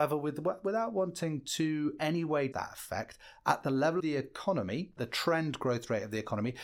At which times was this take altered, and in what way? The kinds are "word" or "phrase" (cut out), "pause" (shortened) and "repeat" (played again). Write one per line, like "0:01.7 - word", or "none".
0:02.0 - word
0:02.5 - word
0:04.0 - word
0:05.0 - word